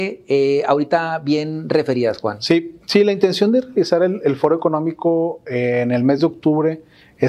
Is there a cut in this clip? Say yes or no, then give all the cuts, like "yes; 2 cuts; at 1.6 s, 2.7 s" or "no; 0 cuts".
no; 0 cuts